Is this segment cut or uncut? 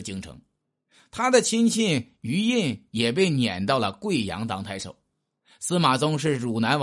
uncut